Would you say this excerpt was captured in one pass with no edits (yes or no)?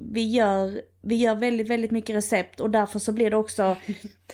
yes